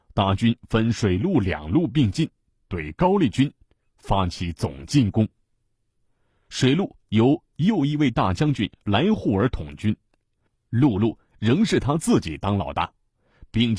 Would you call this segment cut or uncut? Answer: uncut